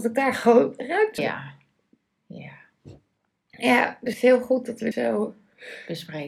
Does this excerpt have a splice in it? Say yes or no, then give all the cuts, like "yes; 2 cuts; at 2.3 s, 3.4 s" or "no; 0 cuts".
yes; 3 cuts; at 1.2 s, 4.1 s, 4.9 s